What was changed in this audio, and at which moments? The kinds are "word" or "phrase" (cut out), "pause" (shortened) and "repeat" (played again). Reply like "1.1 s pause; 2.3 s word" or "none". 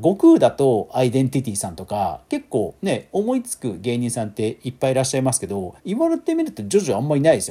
5.8 s pause